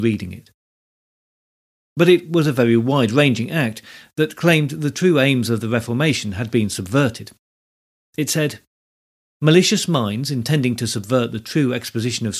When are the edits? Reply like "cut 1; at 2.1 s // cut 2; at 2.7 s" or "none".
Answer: none